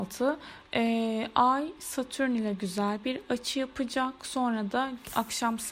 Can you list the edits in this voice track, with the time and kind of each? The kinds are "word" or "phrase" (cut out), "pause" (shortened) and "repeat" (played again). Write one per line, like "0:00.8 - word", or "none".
none

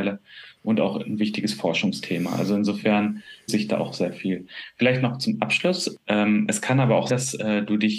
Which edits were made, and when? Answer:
0:03.5 - word
0:07.1 - word

